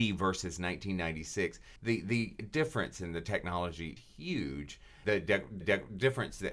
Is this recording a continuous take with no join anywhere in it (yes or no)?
no